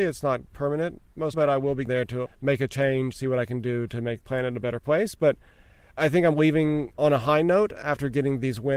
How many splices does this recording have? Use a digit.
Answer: 7